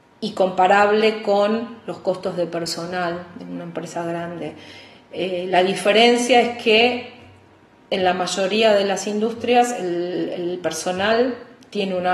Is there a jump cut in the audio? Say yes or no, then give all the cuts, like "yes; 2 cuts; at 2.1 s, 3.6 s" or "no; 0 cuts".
no; 0 cuts